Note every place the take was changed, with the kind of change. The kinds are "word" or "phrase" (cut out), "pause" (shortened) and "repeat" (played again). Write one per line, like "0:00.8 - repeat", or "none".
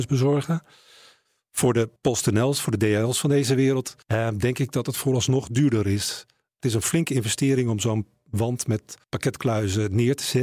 0:02.0 - pause
0:04.0 - pause
0:09.0 - pause